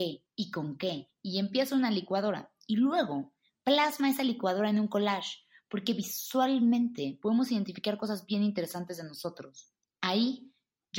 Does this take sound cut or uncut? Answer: uncut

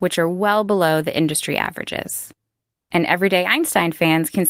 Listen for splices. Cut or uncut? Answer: uncut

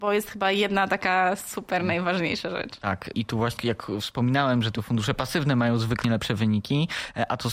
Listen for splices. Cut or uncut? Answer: cut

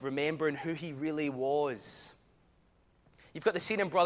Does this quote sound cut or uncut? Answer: uncut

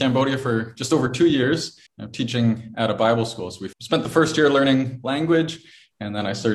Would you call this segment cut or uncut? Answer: cut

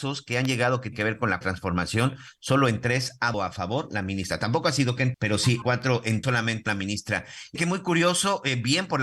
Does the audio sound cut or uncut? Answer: cut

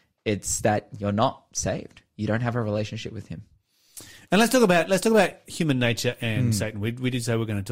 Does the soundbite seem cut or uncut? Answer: uncut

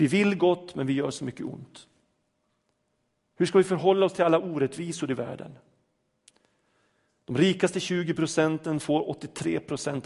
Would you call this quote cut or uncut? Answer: uncut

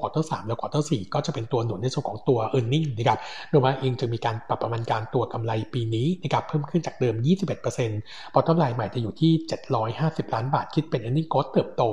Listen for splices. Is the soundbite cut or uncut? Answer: uncut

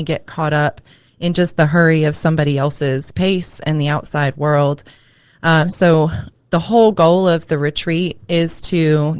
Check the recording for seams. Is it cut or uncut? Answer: uncut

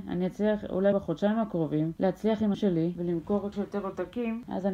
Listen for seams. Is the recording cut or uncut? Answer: cut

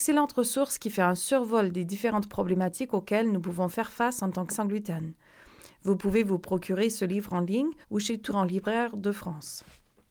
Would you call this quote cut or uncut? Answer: cut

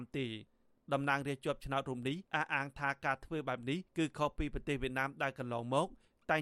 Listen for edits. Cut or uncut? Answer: cut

